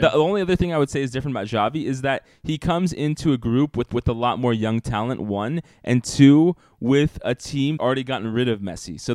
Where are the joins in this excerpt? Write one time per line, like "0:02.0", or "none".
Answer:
0:03.9
0:07.8